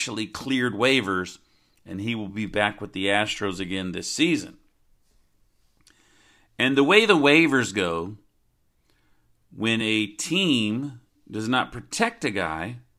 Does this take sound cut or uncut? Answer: uncut